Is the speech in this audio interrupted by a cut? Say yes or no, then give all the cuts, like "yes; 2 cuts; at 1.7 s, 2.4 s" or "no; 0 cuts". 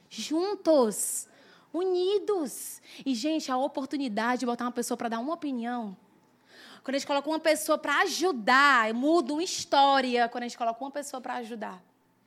no; 0 cuts